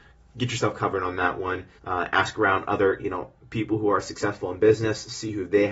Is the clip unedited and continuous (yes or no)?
no